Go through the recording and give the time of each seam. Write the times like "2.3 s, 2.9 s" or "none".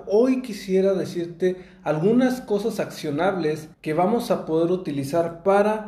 3.7 s